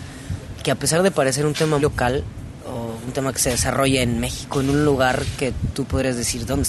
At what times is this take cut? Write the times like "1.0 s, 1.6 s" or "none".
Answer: 1.8 s